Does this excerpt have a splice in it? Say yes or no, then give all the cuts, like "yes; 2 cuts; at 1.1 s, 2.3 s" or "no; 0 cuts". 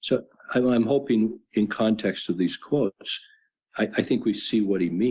no; 0 cuts